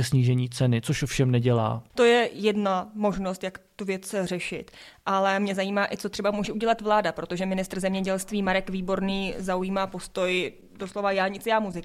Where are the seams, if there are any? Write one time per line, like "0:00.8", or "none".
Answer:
0:01.9